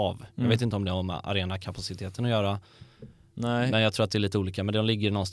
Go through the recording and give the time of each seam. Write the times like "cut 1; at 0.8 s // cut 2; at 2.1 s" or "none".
none